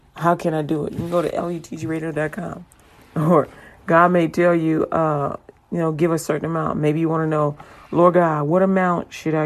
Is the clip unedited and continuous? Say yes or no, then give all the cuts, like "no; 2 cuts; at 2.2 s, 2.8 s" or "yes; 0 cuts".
yes; 0 cuts